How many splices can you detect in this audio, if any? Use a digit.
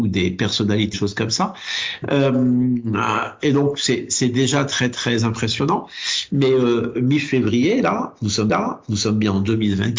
2